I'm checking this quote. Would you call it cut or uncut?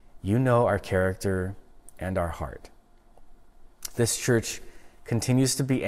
uncut